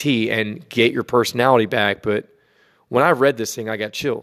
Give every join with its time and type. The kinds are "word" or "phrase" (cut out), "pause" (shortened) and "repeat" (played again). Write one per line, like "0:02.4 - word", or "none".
none